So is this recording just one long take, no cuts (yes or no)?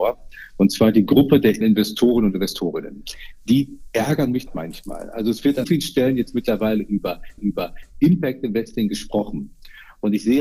no